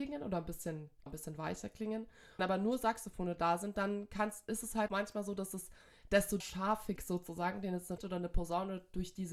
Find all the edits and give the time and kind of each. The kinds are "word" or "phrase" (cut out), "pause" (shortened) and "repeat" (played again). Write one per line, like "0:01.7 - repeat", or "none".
0:01.1 - word
0:02.4 - word
0:04.9 - word
0:06.4 - word
0:07.0 - word
0:08.0 - word